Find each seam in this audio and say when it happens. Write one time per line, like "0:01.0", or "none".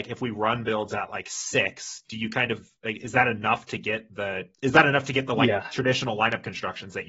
0:02.8
0:04.5

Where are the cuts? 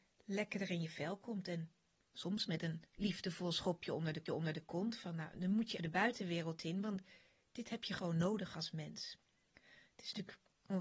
0:02.9
0:04.3
0:05.8

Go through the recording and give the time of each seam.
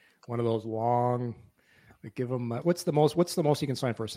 0:02.6

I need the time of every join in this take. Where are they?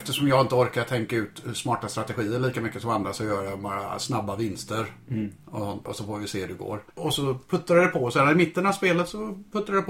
0:06.9

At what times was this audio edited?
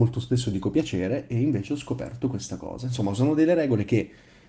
none

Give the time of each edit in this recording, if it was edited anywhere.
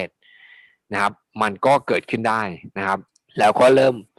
0:03.1

